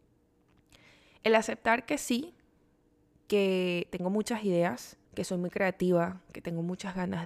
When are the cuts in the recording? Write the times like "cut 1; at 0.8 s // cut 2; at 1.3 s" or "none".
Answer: cut 1; at 5.0 s